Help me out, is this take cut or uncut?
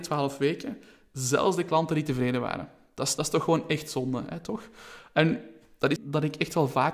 cut